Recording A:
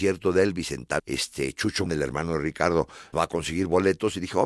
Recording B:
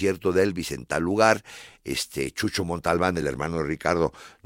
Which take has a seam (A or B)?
A